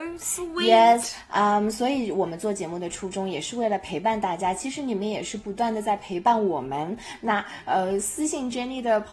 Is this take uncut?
yes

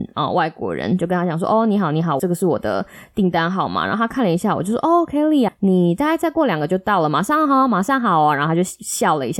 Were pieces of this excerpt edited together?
yes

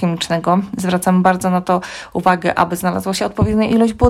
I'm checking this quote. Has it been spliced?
no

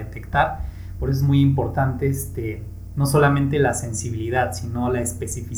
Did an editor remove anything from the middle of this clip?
no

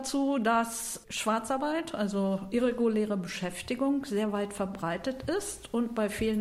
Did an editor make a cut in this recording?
no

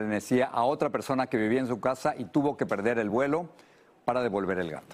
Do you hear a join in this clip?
no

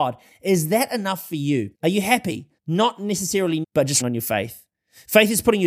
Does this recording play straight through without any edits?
no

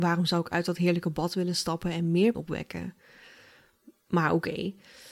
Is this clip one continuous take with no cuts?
no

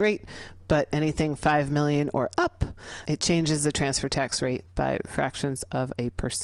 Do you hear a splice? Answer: yes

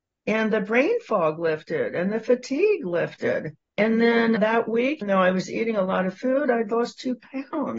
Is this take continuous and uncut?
no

